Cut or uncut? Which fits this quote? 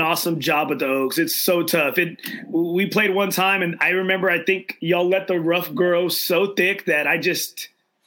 uncut